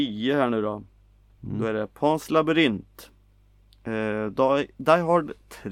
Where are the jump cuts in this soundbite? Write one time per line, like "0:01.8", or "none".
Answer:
none